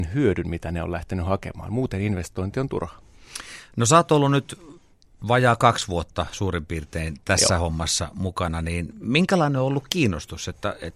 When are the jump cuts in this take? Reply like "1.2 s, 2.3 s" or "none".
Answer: none